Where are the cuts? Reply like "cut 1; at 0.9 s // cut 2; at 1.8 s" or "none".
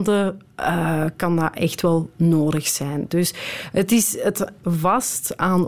cut 1; at 4.6 s